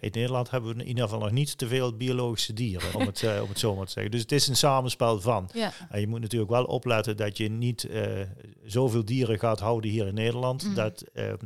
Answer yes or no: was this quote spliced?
yes